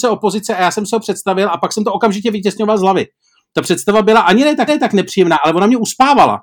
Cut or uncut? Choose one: cut